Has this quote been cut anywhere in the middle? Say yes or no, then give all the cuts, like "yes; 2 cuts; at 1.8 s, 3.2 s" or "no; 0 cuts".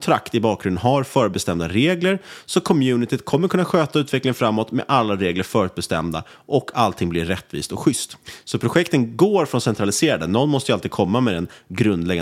no; 0 cuts